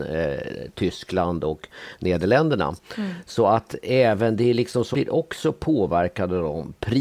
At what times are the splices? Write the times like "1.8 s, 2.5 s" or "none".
4.9 s